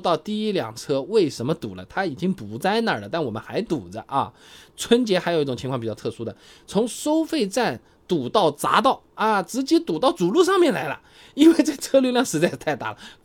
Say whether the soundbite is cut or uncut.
uncut